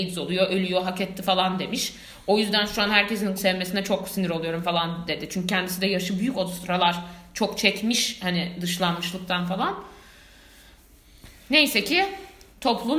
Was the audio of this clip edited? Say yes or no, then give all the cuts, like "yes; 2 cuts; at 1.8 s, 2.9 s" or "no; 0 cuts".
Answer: yes; 1 cut; at 3.4 s